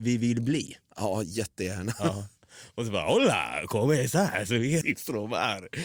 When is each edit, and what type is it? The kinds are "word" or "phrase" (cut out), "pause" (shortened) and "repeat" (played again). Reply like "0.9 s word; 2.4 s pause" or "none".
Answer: 4.8 s phrase